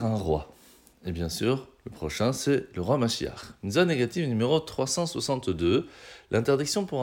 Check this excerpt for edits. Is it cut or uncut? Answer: uncut